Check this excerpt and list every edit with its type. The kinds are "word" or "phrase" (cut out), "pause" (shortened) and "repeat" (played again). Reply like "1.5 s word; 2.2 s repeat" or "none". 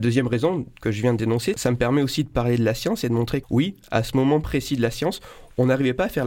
3.4 s word